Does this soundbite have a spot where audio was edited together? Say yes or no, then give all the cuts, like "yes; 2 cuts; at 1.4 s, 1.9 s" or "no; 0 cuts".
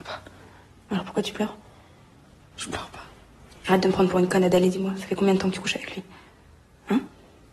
no; 0 cuts